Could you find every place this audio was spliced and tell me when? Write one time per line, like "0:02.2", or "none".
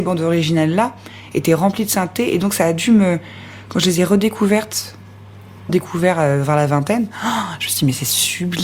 0:05.7

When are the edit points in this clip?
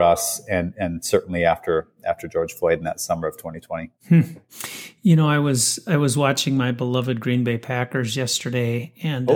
0:04.0

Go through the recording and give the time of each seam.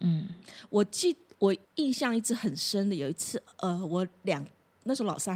0:01.6

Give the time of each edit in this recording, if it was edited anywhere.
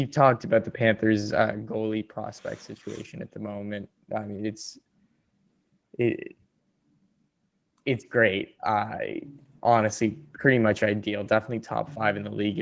none

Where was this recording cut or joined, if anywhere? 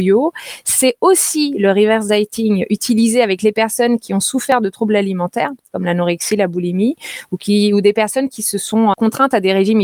0:08.9

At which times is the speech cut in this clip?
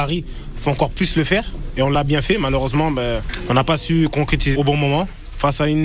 0:04.5

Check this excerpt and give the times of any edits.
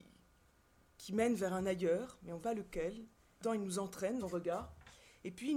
0:02.4
0:03.4
0:04.2

